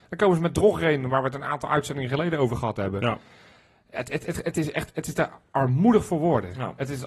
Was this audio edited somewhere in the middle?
no; 0 cuts

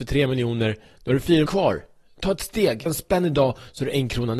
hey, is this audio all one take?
no; 2 cuts; at 1.5 s, 2.9 s

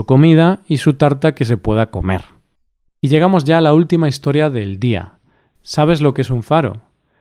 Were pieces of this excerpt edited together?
no; 0 cuts

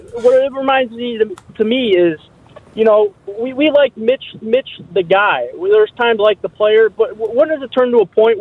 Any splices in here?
yes; 2 cuts; at 4.4 s, 6.2 s

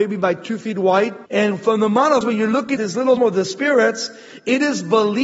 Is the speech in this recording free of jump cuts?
no; 4 cuts; at 1.3 s, 2.2 s, 2.8 s, 3.2 s

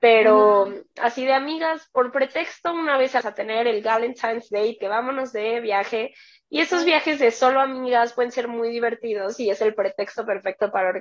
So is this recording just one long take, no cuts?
no; 2 cuts; at 3.2 s, 4.8 s

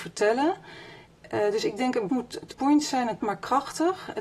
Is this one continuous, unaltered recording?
no; 3 cuts; at 2.1 s, 2.5 s, 3.2 s

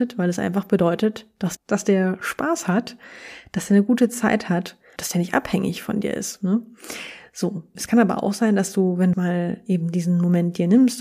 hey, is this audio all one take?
no; 4 cuts; at 1.6 s, 5.0 s, 7.8 s, 9.1 s

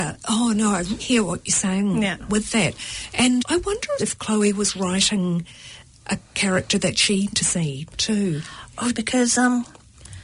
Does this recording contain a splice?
yes; 5 cuts; at 1.0 s, 3.4 s, 4.0 s, 7.3 s, 8.9 s

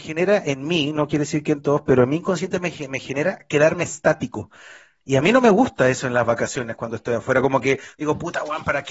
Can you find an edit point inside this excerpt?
no; 0 cuts

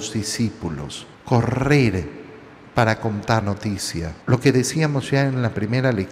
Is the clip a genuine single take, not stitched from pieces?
no; 3 cuts; at 1.1 s, 3.4 s, 4.2 s

